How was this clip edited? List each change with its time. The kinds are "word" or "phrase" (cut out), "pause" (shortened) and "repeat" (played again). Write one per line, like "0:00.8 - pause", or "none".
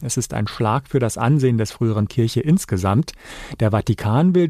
0:02.1 - phrase